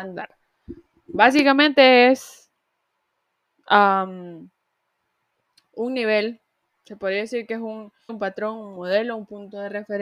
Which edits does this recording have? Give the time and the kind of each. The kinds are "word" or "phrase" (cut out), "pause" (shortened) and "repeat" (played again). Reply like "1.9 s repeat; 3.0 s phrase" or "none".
8.1 s word